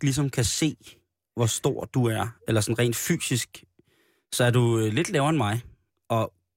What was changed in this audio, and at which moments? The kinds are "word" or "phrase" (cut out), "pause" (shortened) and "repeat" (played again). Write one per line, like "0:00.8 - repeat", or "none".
none